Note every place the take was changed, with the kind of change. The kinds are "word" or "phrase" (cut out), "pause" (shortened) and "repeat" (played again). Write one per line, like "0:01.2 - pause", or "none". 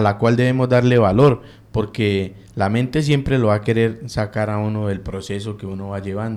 none